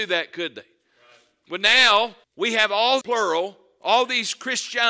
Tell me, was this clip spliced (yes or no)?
yes